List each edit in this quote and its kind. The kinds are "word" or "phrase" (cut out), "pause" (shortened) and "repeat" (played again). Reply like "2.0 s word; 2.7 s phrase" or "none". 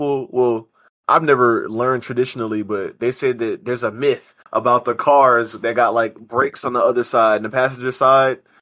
4.4 s pause